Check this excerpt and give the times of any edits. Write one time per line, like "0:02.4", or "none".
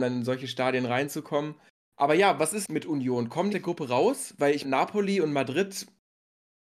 0:01.7
0:02.6
0:03.5
0:04.6